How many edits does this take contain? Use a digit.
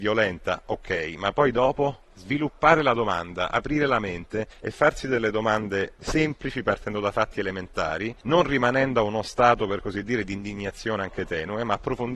0